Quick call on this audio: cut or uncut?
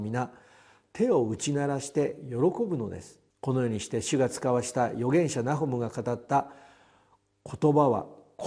cut